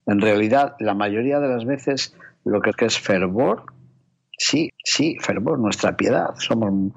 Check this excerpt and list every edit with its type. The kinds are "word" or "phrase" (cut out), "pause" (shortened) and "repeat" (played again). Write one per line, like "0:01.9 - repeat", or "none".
0:02.7 - phrase
0:04.7 - repeat